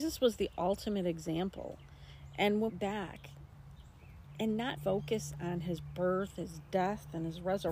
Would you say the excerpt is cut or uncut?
cut